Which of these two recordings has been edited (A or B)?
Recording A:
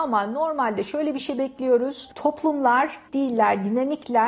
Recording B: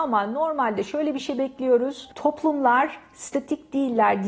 A